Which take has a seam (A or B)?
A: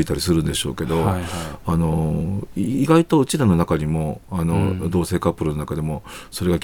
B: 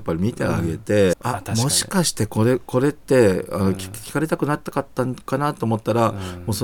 B